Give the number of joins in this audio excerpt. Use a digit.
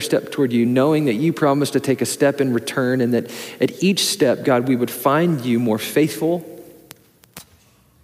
0